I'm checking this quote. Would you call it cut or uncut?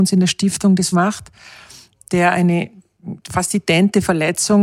cut